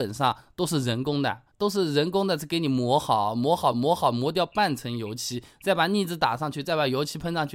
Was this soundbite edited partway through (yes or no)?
yes